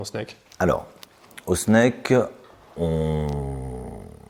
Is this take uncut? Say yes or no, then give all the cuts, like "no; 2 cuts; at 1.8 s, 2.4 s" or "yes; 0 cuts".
yes; 0 cuts